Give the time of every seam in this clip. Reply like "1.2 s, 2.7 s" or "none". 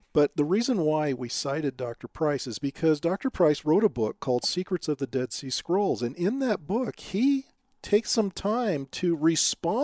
none

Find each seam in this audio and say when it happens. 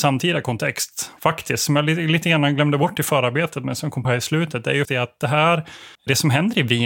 1.2 s, 4.0 s, 4.8 s, 5.9 s

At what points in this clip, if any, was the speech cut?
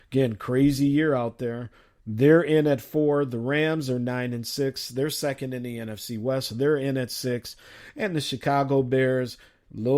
none

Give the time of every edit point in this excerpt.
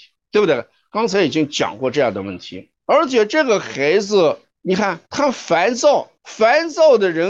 2.8 s, 4.5 s, 5.1 s, 6.2 s

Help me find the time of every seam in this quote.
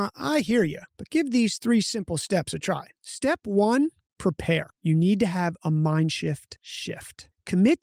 none

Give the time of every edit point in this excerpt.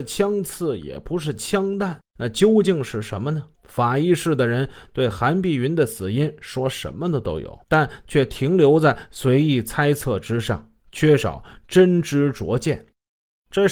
2.1 s, 3.5 s, 7.6 s, 10.8 s

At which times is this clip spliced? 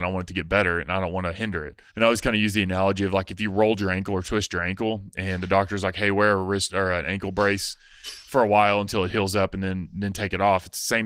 1.9 s

